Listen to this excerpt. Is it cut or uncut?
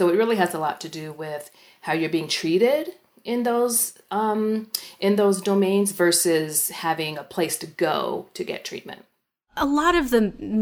uncut